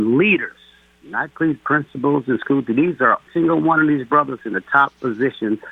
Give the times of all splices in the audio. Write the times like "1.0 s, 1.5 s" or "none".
1.3 s, 3.3 s, 4.4 s